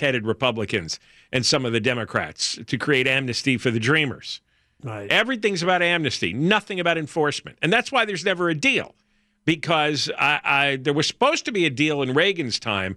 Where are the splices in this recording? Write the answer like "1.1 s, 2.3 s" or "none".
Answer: none